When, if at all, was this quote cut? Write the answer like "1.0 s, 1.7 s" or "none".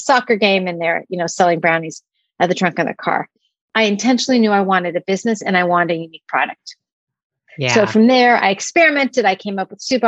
none